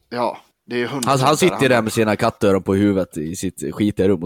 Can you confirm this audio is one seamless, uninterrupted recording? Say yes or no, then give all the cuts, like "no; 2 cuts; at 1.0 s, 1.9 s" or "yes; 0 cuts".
yes; 0 cuts